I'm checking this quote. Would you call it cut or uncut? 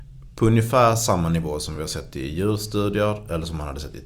uncut